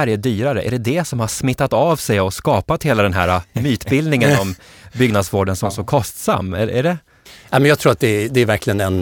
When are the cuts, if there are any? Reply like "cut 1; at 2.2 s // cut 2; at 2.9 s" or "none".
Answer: none